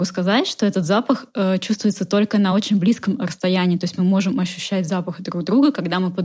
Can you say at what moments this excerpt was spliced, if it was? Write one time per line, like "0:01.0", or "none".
none